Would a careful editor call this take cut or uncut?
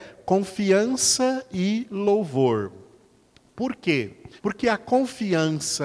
cut